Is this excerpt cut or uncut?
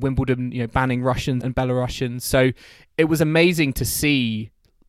cut